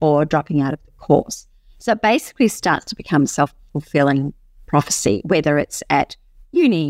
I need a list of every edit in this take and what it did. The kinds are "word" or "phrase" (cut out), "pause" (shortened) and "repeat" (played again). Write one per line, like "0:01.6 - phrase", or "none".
none